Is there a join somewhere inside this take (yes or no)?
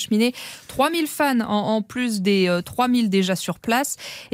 no